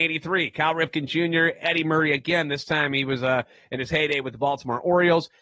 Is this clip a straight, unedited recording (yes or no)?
yes